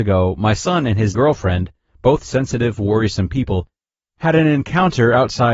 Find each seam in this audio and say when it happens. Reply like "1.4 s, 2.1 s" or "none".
1.1 s

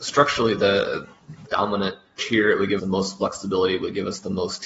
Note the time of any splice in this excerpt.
1.4 s, 2.2 s, 2.8 s

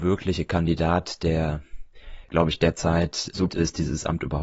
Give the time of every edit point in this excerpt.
2.2 s, 3.5 s

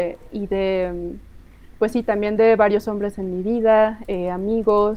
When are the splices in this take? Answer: none

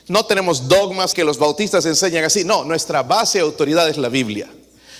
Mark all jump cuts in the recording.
1.1 s

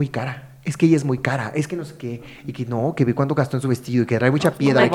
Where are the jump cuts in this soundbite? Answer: none

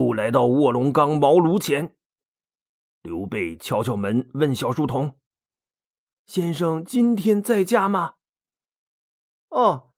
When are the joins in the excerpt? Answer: none

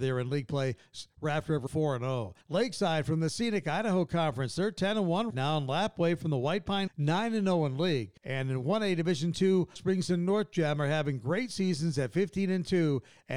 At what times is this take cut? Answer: 1.7 s, 2.4 s, 5.3 s, 6.9 s, 8.2 s, 9.8 s

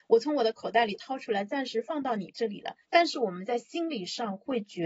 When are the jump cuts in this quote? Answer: 2.8 s

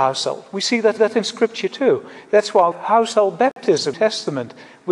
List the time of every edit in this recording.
1.0 s, 2.7 s, 3.9 s

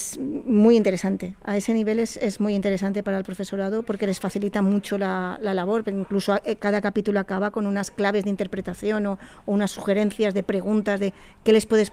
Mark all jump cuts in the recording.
none

